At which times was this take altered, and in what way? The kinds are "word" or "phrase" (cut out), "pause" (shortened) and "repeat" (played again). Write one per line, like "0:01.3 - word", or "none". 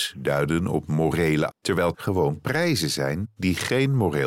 0:01.5 - word
0:01.9 - word

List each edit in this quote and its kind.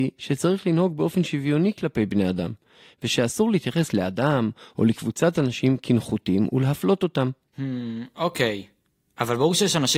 none

